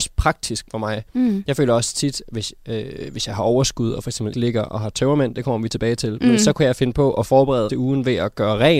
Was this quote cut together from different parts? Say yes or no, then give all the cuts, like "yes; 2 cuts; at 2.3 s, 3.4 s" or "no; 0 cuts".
yes; 2 cuts; at 4.3 s, 7.7 s